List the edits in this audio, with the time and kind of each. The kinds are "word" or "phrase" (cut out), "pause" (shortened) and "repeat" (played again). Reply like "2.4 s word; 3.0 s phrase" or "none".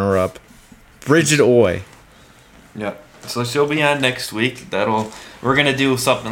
none